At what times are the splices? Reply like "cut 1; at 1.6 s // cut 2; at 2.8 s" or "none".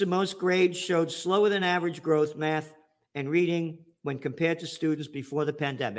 none